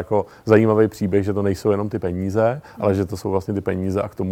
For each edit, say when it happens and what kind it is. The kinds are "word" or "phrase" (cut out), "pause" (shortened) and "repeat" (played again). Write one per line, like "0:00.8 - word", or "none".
none